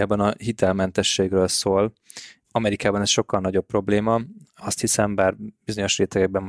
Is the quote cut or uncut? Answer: uncut